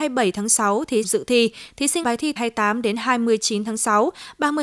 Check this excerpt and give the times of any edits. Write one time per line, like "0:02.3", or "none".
0:01.0
0:02.0
0:02.4